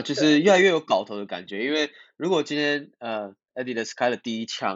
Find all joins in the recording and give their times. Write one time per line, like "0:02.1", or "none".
none